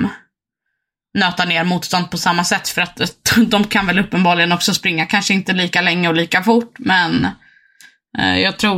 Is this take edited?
no; 0 cuts

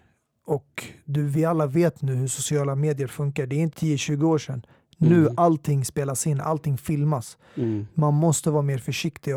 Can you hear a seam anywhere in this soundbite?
yes; 1 cut; at 3.7 s

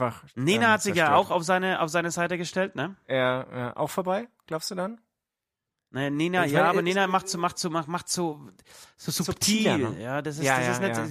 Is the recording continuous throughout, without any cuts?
yes; 0 cuts

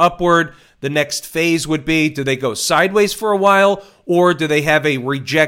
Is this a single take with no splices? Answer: yes; 0 cuts

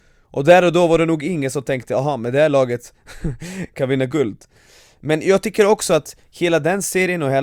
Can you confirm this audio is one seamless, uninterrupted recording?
yes; 0 cuts

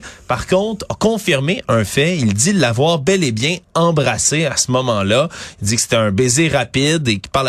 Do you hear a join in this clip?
no; 0 cuts

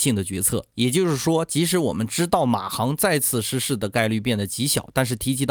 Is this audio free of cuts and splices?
yes; 0 cuts

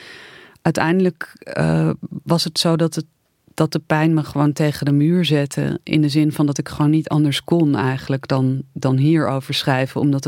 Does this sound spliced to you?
no; 0 cuts

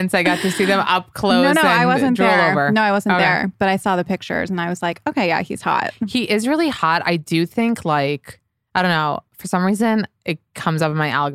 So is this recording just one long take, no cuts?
yes; 0 cuts

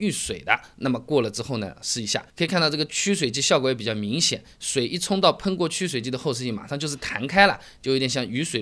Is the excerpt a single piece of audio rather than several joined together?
no; 1 cut; at 2.3 s

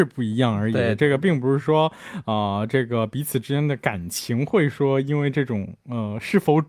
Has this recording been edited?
no; 0 cuts

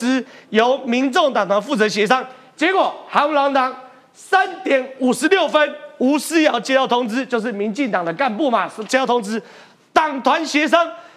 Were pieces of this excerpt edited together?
no; 0 cuts

